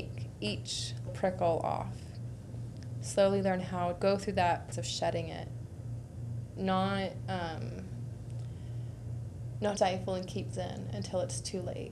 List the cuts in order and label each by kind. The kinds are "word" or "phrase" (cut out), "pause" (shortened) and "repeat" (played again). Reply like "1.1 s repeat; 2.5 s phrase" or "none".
1.1 s word; 4.0 s word; 4.7 s word; 6.6 s word; 9.8 s word; 10.5 s word